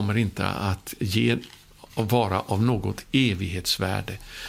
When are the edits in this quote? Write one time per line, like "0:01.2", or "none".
none